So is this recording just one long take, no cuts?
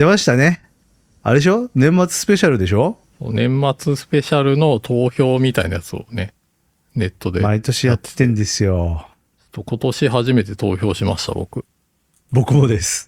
yes; 0 cuts

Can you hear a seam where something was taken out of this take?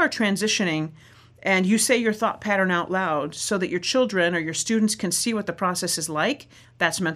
no; 0 cuts

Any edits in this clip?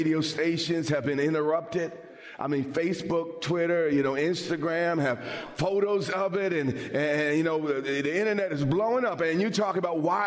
no; 0 cuts

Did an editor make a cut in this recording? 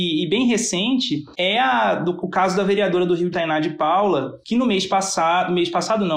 yes; 1 cut; at 3.3 s

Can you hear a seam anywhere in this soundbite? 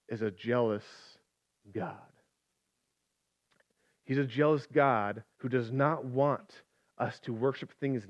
yes; 1 cut; at 5.3 s

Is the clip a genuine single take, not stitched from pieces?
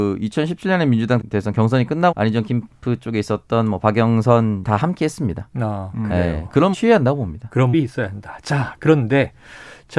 no; 5 cuts; at 1.2 s, 2.1 s, 4.6 s, 6.7 s, 7.7 s

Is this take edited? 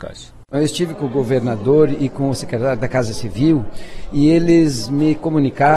no; 0 cuts

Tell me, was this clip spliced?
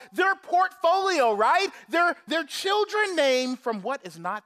yes; 1 cut; at 2.3 s

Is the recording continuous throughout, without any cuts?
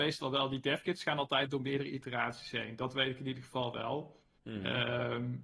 yes; 0 cuts

